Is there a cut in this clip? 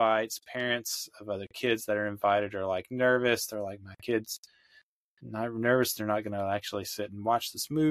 no; 0 cuts

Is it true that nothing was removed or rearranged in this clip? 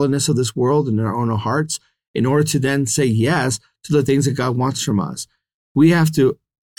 yes; 0 cuts

